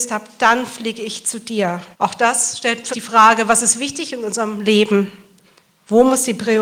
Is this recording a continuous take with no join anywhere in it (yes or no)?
no